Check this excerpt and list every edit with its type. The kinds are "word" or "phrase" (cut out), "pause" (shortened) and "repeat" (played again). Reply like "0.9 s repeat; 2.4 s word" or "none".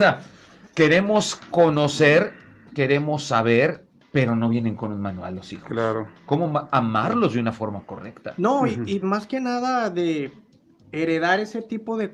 9.0 s word